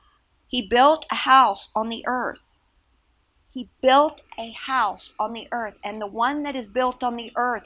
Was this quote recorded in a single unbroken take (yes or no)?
yes